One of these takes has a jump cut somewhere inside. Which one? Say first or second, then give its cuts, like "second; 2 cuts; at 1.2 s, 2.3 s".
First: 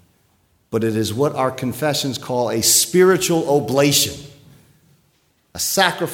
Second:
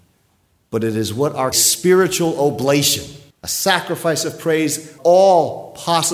second; 3 cuts; at 1.5 s, 3.3 s, 5.0 s